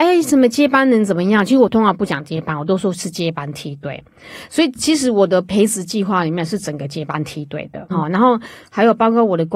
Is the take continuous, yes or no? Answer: no